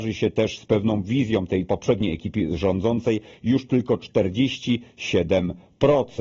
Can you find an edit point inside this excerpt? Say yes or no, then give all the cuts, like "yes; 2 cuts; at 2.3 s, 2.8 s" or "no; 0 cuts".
no; 0 cuts